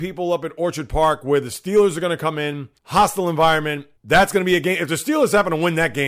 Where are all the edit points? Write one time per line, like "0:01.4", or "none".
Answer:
0:02.8
0:04.0